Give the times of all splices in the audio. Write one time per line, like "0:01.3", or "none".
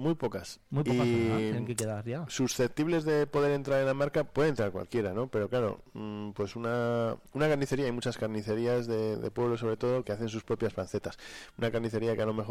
0:07.3
0:10.0